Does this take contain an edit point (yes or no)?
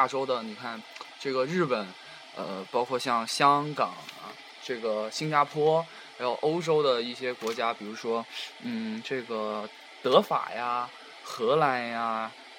no